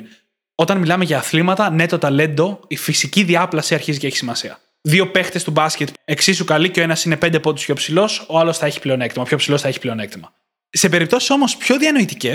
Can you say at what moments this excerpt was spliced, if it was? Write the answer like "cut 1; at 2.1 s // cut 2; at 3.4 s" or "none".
cut 1; at 6.0 s